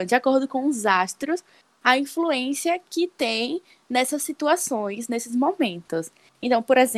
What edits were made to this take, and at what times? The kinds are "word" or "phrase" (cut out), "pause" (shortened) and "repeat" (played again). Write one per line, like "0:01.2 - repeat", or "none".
none